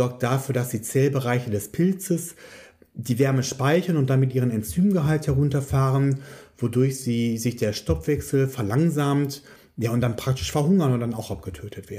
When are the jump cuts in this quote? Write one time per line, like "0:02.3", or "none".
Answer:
none